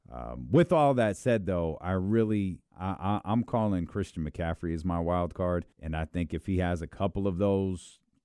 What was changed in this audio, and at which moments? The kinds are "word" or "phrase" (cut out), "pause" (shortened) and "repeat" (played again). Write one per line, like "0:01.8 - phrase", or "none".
0:02.7 - pause
0:05.7 - pause

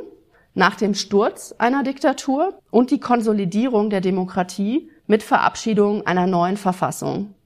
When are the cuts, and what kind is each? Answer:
0:02.6 - pause
0:05.0 - pause

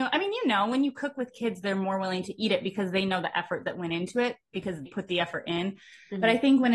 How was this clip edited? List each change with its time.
0:04.9 - word

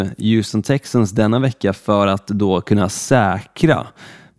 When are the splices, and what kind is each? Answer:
none

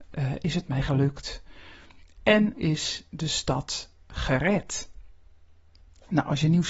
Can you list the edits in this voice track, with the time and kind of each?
0:02.5 - word

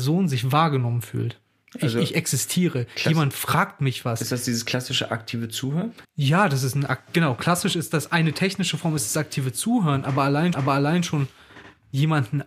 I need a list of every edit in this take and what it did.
0:06.0 - pause
0:10.5 - repeat

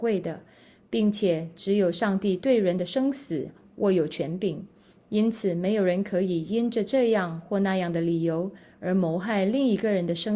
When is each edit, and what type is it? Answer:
none

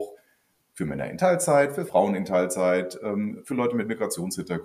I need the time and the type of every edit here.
none

